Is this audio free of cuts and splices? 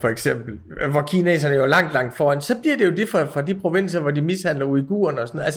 yes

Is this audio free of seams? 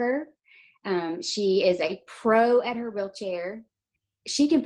yes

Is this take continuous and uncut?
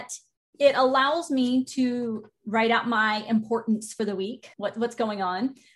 no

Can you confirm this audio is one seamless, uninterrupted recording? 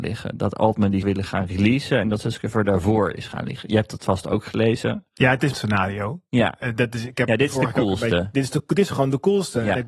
no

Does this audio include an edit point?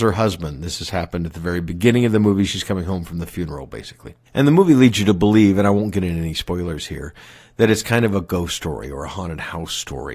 yes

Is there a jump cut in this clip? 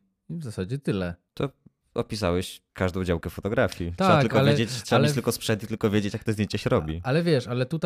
yes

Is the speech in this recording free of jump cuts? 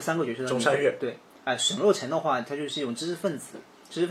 yes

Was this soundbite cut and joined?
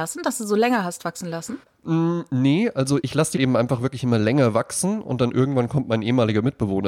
yes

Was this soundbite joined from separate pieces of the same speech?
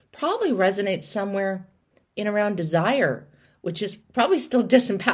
no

